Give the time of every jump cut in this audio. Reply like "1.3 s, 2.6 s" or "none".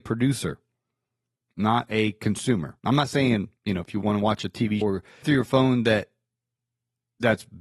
2.8 s, 3.6 s, 4.8 s, 5.2 s